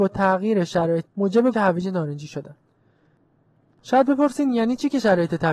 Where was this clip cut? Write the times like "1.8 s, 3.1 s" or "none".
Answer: 1.1 s, 1.5 s